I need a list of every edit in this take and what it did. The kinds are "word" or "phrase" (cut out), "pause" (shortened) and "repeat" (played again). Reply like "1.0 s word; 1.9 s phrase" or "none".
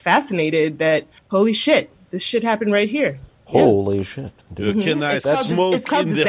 1.2 s pause; 4.4 s pause